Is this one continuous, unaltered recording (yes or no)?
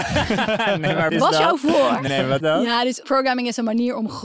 no